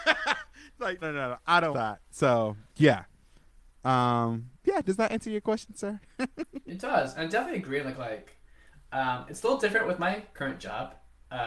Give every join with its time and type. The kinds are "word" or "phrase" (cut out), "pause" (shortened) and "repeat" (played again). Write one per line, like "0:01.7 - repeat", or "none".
0:01.0 - word
0:01.7 - word
0:02.7 - pause
0:04.6 - pause
0:07.9 - phrase